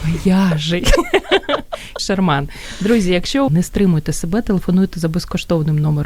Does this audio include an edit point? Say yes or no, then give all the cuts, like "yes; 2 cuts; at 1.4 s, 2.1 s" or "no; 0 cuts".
yes; 2 cuts; at 2.0 s, 3.5 s